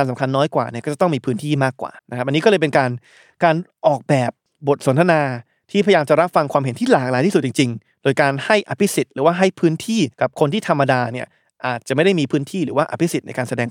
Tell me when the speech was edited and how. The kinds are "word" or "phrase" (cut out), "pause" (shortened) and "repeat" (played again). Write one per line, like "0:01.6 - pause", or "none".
0:02.0 - pause
0:04.5 - pause
0:10.1 - pause